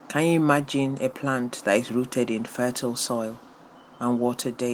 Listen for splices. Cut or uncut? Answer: uncut